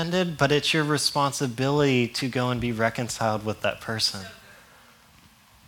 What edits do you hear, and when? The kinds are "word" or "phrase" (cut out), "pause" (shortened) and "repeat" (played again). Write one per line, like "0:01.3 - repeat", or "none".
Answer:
none